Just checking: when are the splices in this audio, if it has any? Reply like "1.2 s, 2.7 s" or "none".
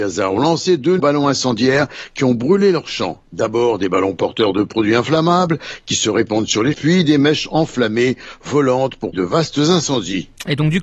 1.0 s, 6.7 s, 9.1 s